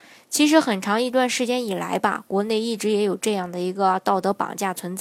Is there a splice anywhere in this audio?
no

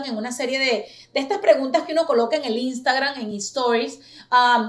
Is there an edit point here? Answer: no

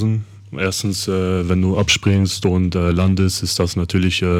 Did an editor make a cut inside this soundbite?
no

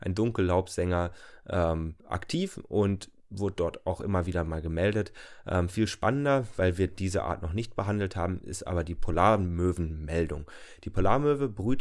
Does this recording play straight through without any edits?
no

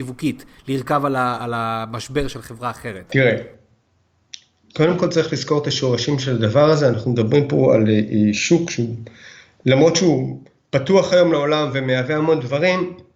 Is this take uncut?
yes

